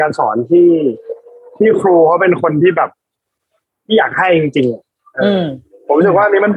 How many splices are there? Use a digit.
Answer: 0